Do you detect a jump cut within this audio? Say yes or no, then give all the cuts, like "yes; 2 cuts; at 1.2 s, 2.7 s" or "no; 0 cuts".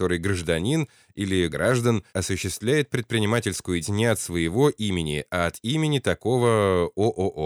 yes; 3 cuts; at 1.5 s, 2.1 s, 3.8 s